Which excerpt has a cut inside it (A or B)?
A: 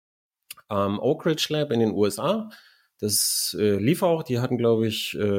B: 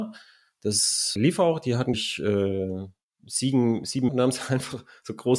B